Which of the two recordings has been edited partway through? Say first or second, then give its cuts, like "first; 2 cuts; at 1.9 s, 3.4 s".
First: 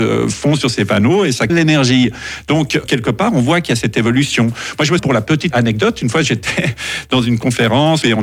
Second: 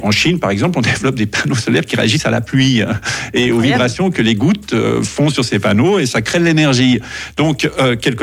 first; 4 cuts; at 1.5 s, 2.8 s, 5.0 s, 5.5 s